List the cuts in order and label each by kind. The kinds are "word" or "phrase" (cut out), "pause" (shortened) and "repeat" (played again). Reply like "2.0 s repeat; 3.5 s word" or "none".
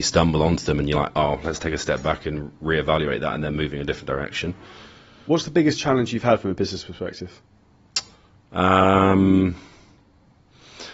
none